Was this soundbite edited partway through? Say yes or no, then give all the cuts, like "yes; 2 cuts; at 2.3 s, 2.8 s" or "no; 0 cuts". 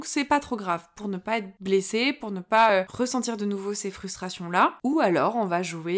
no; 0 cuts